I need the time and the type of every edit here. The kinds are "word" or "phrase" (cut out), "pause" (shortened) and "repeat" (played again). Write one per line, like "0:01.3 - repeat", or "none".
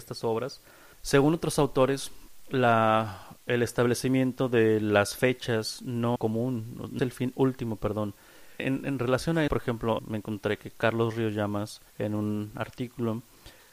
0:00.9 - pause
0:03.4 - pause
0:06.2 - phrase
0:07.0 - word
0:08.6 - word
0:09.5 - word
0:10.0 - word
0:11.9 - pause